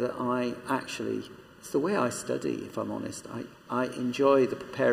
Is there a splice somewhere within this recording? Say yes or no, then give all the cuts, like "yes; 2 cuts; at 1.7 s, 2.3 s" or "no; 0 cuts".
yes; 1 cut; at 3.5 s